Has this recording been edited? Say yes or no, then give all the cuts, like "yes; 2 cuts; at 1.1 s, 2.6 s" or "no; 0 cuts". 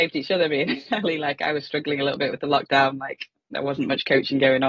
no; 0 cuts